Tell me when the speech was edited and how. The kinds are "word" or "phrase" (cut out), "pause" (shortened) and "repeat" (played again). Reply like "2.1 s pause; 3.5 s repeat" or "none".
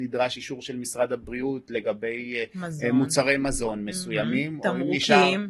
none